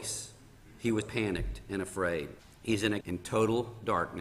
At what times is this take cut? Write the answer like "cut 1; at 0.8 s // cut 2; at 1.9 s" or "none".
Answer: cut 1; at 1.0 s // cut 2; at 2.4 s // cut 3; at 3.0 s